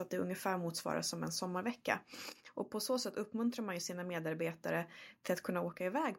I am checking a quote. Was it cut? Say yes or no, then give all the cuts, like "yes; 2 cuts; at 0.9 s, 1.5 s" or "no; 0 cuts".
no; 0 cuts